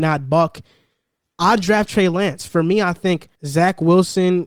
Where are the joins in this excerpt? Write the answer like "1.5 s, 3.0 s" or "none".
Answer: 3.4 s